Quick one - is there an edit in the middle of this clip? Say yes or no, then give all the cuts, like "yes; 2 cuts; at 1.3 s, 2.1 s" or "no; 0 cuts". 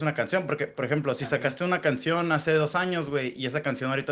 no; 0 cuts